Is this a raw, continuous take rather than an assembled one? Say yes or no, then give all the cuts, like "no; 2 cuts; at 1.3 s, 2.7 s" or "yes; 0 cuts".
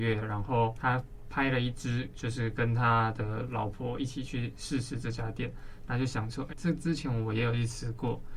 no; 1 cut; at 6.5 s